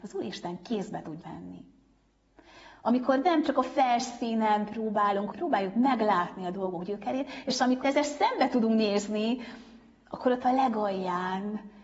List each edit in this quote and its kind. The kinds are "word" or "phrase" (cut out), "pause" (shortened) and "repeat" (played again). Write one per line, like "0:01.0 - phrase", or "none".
0:01.2 - word
0:05.3 - word
0:07.8 - word